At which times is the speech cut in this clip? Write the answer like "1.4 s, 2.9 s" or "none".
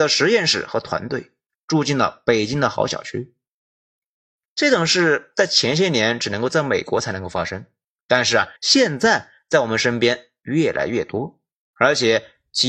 8.6 s